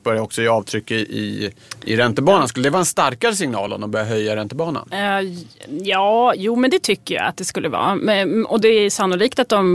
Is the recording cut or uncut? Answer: uncut